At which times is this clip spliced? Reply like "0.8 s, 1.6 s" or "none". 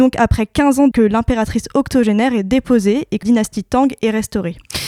0.9 s, 3.2 s